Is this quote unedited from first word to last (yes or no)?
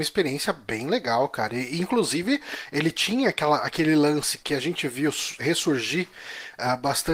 no